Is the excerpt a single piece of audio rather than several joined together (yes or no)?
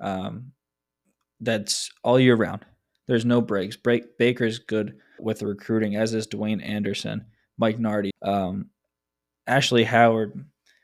no